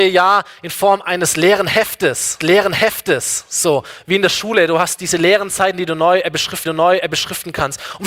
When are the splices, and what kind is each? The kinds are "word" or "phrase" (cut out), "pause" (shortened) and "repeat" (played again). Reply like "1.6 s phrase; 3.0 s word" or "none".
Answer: 2.4 s repeat; 6.7 s repeat

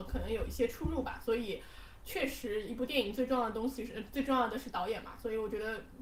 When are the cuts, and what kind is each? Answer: none

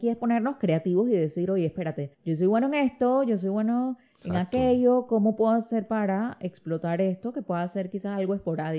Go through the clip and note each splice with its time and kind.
2.1 s pause

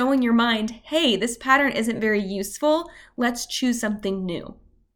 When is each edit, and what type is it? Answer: none

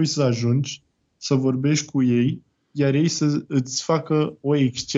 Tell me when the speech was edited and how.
none

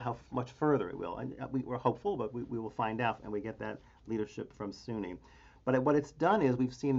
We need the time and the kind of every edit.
4.5 s word

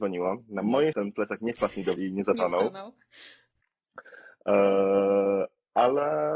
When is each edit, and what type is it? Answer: 0.9 s word; 2.0 s word

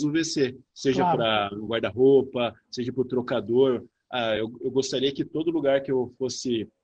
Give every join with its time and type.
none

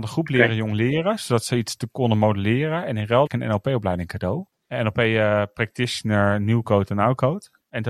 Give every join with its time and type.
3.3 s phrase; 4.5 s pause

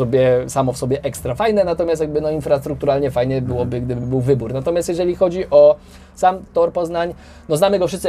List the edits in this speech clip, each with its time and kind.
none

